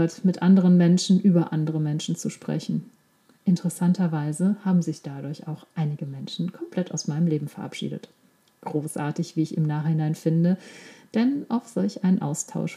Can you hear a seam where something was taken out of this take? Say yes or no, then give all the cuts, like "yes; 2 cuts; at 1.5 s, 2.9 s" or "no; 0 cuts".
no; 0 cuts